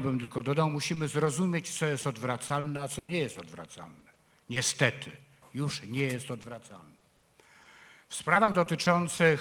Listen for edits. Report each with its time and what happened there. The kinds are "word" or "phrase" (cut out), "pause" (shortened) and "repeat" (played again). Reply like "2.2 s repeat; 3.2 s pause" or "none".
none